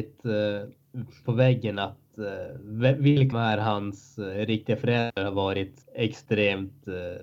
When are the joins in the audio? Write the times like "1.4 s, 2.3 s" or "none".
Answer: 1.3 s, 3.3 s, 5.8 s